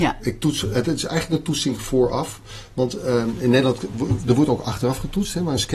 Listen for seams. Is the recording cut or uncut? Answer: uncut